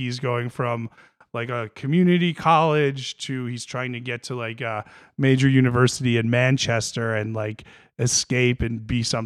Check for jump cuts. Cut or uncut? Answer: uncut